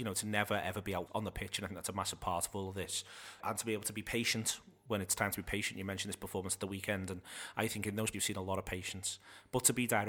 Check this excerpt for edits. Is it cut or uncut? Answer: cut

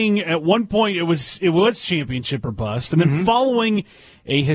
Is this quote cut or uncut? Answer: uncut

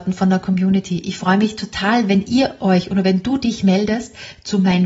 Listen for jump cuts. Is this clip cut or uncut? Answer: uncut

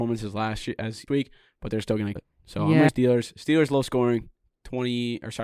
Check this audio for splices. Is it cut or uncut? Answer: cut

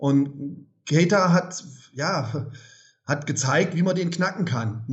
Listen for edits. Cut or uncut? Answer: uncut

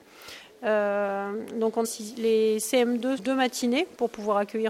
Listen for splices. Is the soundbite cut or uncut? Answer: cut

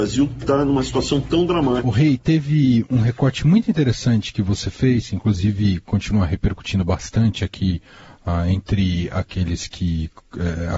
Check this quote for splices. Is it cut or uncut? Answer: uncut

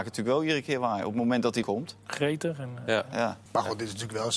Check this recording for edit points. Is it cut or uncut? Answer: cut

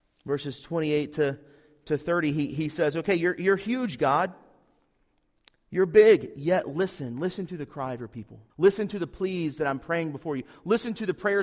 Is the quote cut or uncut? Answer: cut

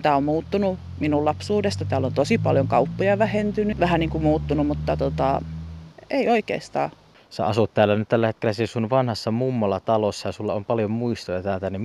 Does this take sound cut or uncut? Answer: cut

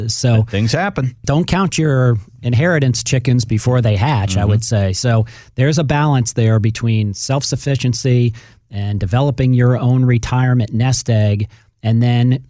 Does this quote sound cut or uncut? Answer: uncut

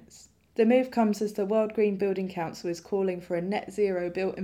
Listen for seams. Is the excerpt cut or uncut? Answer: uncut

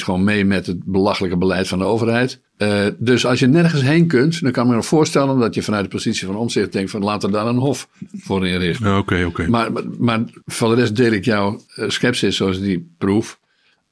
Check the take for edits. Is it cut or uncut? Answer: cut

